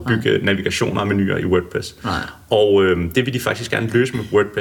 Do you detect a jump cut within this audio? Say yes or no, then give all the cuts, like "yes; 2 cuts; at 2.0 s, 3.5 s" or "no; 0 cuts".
no; 0 cuts